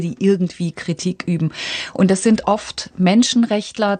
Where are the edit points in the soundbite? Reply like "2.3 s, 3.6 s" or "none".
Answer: none